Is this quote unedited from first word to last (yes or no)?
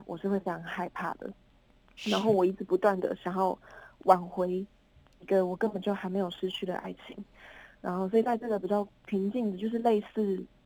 yes